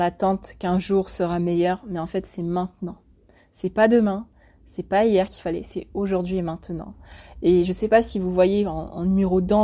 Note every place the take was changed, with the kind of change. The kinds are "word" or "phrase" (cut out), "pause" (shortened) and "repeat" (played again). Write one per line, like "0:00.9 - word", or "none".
none